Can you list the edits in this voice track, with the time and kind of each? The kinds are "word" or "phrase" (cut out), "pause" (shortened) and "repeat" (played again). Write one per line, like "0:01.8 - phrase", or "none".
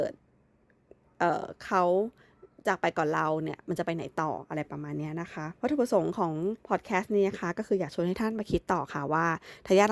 0:05.6 - pause
0:06.6 - pause